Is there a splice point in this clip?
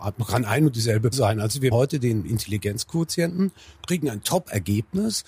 yes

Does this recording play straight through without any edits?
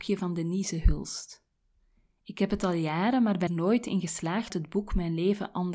no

